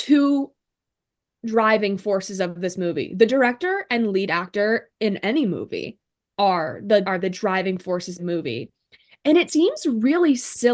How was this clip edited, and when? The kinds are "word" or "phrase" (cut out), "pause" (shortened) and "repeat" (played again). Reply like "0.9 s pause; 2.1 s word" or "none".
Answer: 7.0 s word; 8.2 s word; 9.5 s word